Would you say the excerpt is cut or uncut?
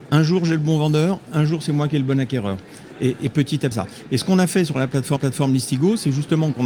cut